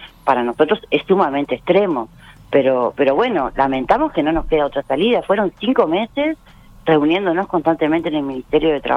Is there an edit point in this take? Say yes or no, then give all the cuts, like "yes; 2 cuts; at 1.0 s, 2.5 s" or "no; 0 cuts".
no; 0 cuts